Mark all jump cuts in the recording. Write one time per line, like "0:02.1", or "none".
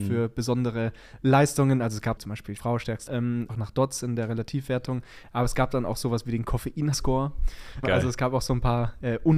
0:02.2
0:02.6
0:03.1
0:03.5
0:06.9
0:07.8